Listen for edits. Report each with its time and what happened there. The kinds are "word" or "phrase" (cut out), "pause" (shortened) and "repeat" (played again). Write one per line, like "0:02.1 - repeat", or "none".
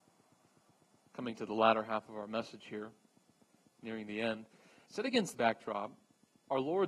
0:05.3 - word